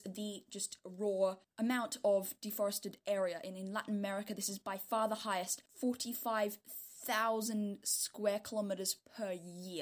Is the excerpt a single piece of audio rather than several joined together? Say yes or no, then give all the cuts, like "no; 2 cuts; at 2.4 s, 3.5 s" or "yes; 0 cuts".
no; 1 cut; at 5.6 s